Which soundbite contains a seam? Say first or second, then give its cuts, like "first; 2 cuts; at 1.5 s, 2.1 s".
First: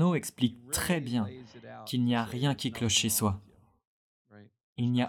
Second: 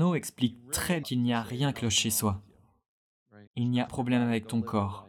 second; 4 cuts; at 1.0 s, 1.7 s, 3.5 s, 3.9 s